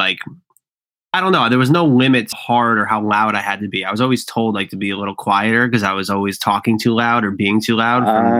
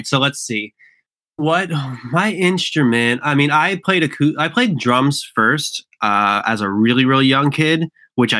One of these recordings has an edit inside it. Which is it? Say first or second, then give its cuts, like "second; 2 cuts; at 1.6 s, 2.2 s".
first; 1 cut; at 2.3 s